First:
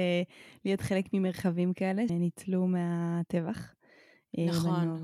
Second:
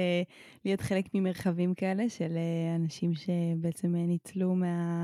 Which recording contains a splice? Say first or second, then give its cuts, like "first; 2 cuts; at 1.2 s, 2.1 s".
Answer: first; 1 cut; at 2.1 s